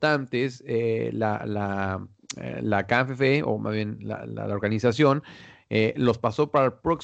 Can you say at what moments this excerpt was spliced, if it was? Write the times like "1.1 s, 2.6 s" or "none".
none

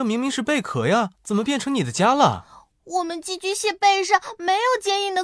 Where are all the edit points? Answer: 1.2 s

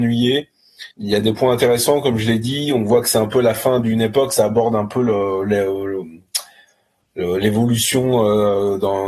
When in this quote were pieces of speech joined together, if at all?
0.9 s

